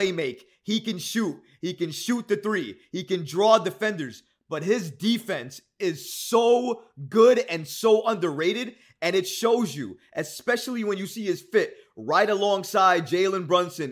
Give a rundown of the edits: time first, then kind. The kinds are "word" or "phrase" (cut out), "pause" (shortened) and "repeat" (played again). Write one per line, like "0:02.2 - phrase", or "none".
none